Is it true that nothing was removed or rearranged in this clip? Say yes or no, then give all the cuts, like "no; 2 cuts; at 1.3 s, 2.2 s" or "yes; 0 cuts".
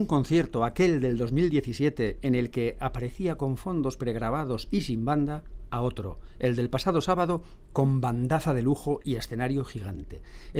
yes; 0 cuts